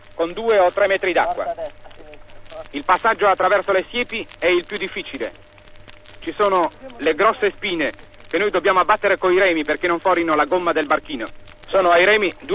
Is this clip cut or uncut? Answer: uncut